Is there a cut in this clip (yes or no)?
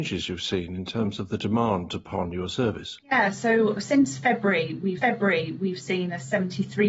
yes